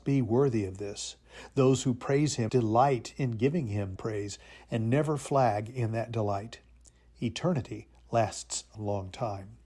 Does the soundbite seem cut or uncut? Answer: cut